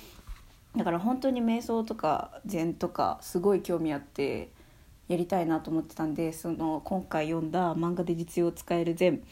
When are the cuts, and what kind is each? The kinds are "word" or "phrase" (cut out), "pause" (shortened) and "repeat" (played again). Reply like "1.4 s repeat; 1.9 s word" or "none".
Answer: none